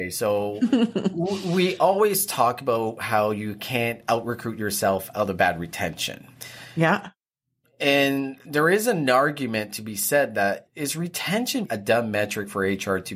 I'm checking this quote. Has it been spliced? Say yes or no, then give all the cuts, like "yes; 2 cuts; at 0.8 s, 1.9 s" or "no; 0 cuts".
no; 0 cuts